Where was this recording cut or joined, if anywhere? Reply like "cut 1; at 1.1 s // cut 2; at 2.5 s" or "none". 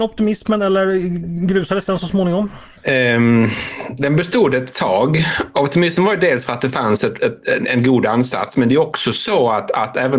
cut 1; at 2.8 s // cut 2; at 7.6 s